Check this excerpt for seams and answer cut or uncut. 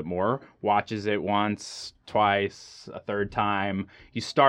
uncut